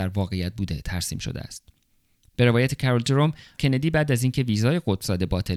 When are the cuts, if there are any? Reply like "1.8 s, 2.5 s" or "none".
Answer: 3.6 s